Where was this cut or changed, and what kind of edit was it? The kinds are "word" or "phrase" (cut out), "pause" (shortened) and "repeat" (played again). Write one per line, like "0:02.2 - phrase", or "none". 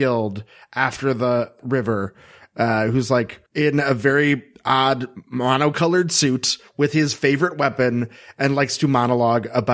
0:03.5 - pause